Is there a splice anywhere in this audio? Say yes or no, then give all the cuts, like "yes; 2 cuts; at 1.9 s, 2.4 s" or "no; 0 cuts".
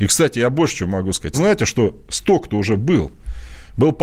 yes; 1 cut; at 1.3 s